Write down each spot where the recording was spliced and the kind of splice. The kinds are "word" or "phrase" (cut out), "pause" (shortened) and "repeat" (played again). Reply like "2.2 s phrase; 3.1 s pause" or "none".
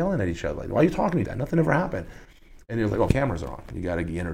1.2 s phrase; 3.1 s phrase